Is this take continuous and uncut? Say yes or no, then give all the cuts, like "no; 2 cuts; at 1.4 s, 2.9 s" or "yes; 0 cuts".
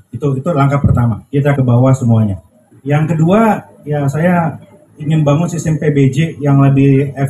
no; 1 cut; at 1.6 s